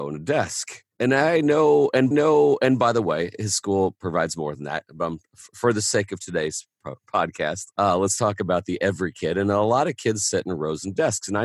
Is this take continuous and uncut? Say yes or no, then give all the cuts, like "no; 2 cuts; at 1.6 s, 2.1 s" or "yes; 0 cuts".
no; 3 cuts; at 0.9 s, 2.1 s, 7.7 s